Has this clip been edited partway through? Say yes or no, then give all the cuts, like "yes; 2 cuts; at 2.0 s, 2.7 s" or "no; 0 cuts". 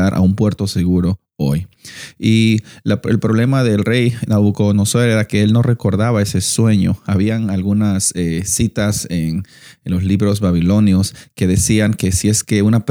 no; 0 cuts